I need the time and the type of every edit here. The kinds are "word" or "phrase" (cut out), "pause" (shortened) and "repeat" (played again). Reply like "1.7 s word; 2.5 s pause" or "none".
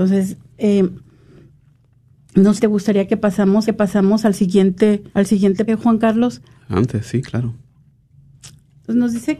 2.6 s phrase; 3.7 s repeat; 5.1 s pause; 5.7 s word; 6.5 s pause